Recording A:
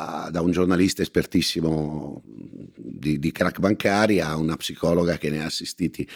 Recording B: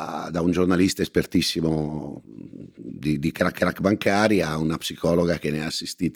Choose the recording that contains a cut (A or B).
B